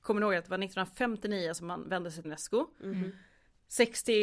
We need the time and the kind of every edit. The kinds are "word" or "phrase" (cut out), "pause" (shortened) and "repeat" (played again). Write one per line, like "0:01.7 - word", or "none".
0:02.2 - word